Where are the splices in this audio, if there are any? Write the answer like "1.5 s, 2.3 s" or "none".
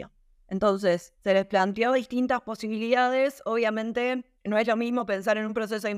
1.2 s, 4.4 s